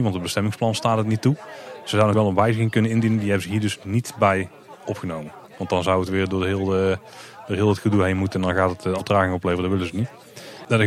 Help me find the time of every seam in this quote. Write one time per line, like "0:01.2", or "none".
0:02.1
0:05.4
0:09.0